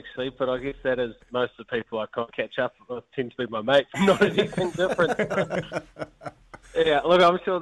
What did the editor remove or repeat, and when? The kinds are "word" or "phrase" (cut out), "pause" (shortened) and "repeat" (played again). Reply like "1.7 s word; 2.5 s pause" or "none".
1.2 s phrase; 2.3 s word; 3.9 s word; 6.6 s word